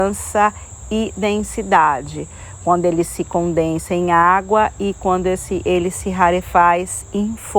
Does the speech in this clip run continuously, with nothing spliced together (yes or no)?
yes